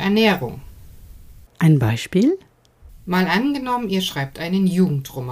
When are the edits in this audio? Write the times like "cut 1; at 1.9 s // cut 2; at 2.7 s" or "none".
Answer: cut 1; at 1.5 s